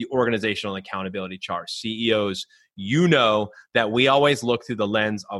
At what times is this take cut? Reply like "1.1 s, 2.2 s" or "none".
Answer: none

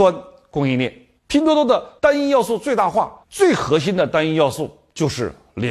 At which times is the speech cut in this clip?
1.2 s, 2.0 s, 3.2 s

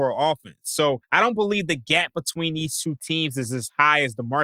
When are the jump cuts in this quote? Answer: 1.0 s

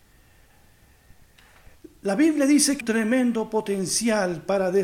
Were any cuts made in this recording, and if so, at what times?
2.8 s

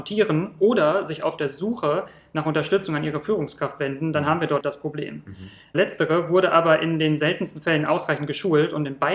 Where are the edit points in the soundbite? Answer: 4.6 s

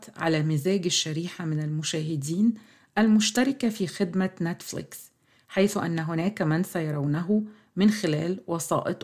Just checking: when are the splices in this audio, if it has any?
none

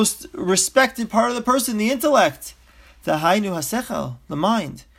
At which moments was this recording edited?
none

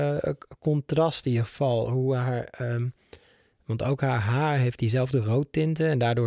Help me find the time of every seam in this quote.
none

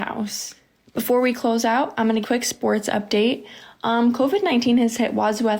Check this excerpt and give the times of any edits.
2.2 s

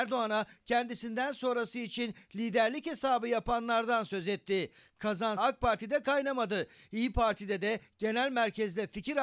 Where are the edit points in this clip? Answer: 5.4 s

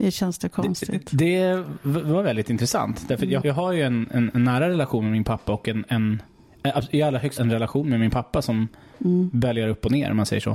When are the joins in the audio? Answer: 3.4 s, 7.4 s

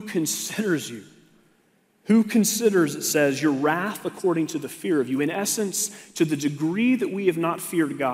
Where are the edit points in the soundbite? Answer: none

